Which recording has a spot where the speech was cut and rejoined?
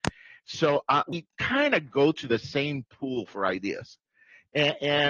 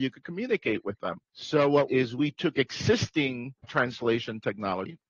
second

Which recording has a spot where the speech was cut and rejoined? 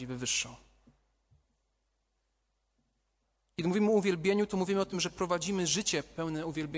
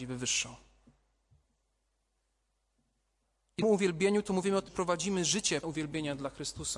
second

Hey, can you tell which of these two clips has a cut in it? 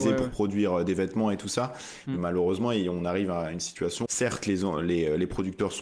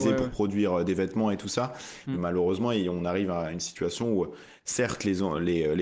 first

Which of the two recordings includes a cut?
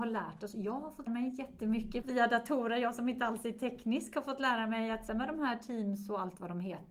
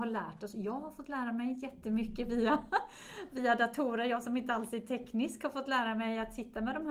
first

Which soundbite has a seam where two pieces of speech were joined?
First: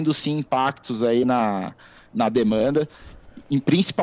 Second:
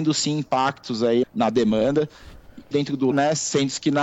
second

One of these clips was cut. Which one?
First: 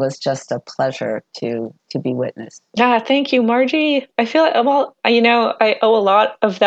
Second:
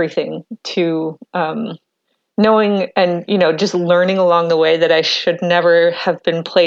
first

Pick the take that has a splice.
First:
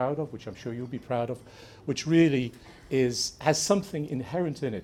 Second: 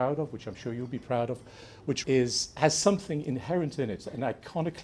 second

